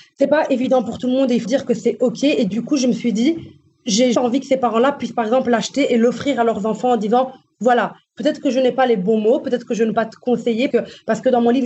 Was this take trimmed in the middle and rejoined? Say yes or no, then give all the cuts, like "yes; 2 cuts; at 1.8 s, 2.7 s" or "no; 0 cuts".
yes; 4 cuts; at 1.4 s, 4.1 s, 9.9 s, 10.7 s